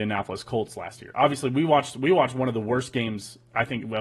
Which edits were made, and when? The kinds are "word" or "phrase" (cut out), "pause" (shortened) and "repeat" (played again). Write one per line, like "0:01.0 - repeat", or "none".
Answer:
none